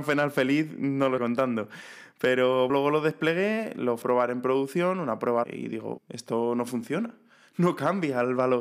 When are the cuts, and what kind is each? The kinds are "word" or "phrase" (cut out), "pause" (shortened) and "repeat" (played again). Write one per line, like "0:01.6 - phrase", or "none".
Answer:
0:01.2 - word
0:02.7 - word
0:04.0 - word
0:05.4 - word
0:06.0 - word